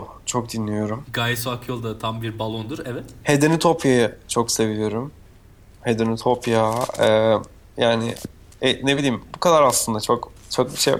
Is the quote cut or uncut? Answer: uncut